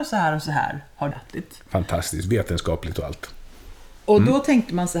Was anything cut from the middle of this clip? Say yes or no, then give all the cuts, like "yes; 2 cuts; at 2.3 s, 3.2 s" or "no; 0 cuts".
yes; 1 cut; at 1.1 s